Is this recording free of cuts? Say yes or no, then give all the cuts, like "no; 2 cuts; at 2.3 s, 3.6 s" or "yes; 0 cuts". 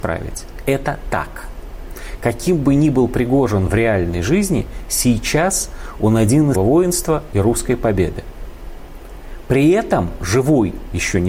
no; 1 cut; at 6.5 s